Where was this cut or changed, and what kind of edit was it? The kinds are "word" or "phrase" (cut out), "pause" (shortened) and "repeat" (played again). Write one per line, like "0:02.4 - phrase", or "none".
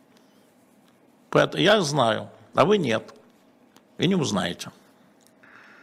none